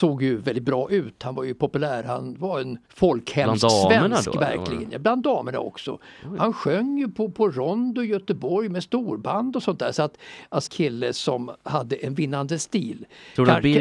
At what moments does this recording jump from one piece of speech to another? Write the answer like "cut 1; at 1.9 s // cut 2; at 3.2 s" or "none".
cut 1; at 2.8 s // cut 2; at 10.7 s